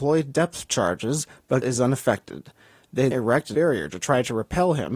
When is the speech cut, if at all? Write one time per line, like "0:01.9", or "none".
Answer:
0:01.6
0:03.1
0:03.5